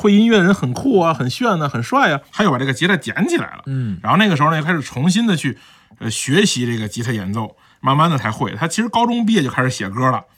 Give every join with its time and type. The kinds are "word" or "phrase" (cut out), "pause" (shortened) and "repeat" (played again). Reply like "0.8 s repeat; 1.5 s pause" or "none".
2.3 s pause